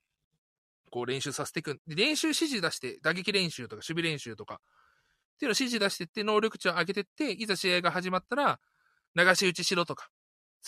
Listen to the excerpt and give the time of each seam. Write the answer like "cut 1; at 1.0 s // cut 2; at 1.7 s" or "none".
none